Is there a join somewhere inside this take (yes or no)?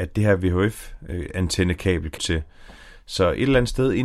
yes